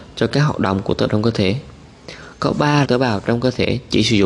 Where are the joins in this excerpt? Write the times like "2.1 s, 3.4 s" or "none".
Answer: 1.1 s, 2.8 s